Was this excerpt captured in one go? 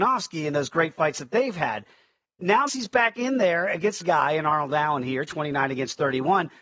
no; 2 cuts; at 2.7 s, 4.0 s

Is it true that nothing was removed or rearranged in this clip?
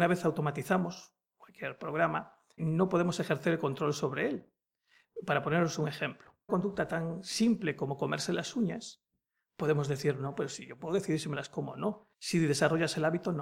no; 3 cuts; at 2.6 s, 6.5 s, 12.1 s

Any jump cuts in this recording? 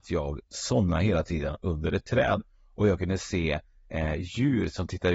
no; 0 cuts

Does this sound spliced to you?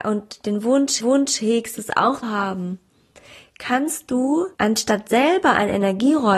yes; 3 cuts; at 1.0 s, 2.2 s, 4.5 s

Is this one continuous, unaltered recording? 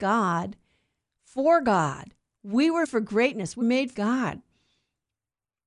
no; 3 cuts; at 2.8 s, 3.6 s, 3.9 s

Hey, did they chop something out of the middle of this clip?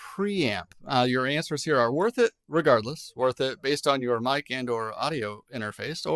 no; 0 cuts

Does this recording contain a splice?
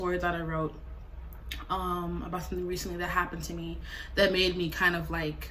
no; 0 cuts

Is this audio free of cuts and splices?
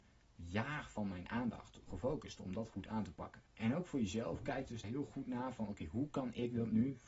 no; 3 cuts; at 1.9 s, 3.4 s, 4.8 s

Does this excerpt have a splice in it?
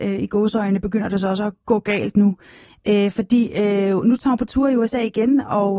no; 0 cuts

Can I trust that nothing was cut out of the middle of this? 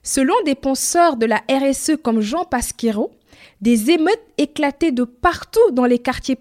yes; 0 cuts

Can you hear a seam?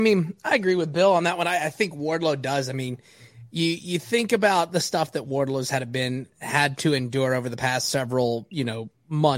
no; 0 cuts

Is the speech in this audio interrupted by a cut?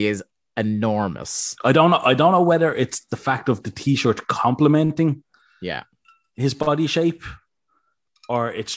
no; 0 cuts

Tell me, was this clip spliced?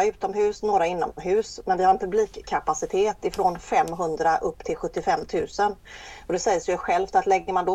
no; 0 cuts

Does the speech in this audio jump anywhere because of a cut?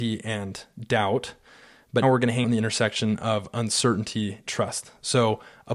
yes; 3 cuts; at 2.0 s, 2.4 s, 4.5 s

